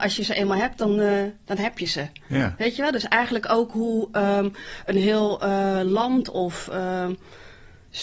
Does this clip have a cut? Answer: no; 0 cuts

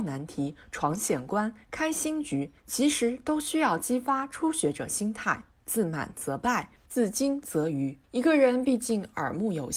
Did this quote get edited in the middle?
yes; 3 cuts; at 2.6 s, 5.5 s, 8.0 s

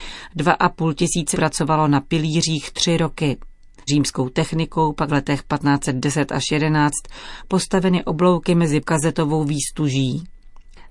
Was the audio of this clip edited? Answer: yes; 4 cuts; at 1.3 s, 3.9 s, 5.1 s, 8.8 s

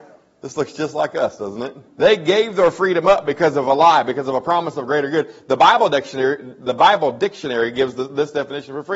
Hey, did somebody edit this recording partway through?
yes; 1 cut; at 1.9 s

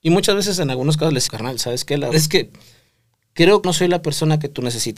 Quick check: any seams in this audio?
yes; 3 cuts; at 1.3 s, 2.1 s, 3.6 s

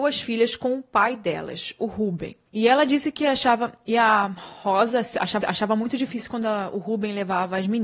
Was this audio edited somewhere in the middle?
yes; 1 cut; at 5.4 s

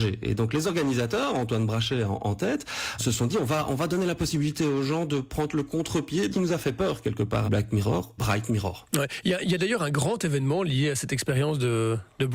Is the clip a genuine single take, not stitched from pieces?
no; 4 cuts; at 3.0 s, 6.3 s, 7.5 s, 8.2 s

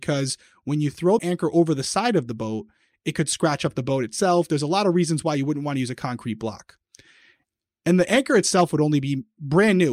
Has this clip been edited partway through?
yes; 1 cut; at 1.2 s

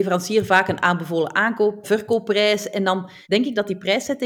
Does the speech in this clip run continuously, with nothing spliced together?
no; 2 cuts; at 1.8 s, 3.2 s

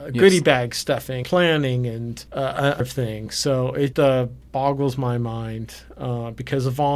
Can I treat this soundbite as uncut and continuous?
no; 4 cuts; at 1.2 s, 2.3 s, 2.8 s, 3.9 s

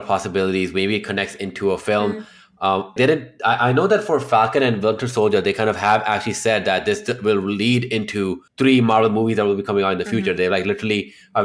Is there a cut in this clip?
yes; 2 cuts; at 3.0 s, 8.5 s

